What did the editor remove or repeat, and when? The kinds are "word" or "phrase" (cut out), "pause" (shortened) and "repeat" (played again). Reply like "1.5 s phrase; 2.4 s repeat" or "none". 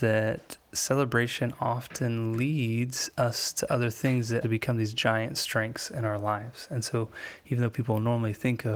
4.4 s word